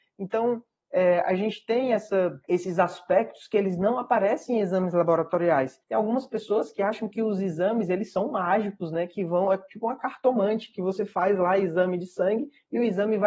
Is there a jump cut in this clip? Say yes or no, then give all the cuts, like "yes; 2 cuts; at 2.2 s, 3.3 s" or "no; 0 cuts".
yes; 2 cuts; at 2.4 s, 5.8 s